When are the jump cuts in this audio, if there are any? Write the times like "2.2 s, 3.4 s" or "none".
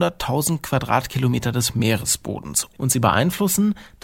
none